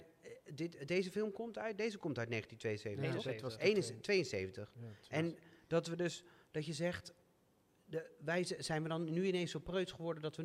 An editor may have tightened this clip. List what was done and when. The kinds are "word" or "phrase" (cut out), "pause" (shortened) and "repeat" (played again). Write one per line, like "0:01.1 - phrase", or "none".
none